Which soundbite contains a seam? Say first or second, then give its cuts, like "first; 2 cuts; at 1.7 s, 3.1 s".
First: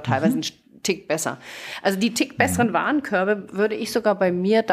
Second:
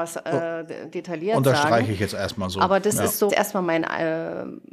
second; 1 cut; at 3.3 s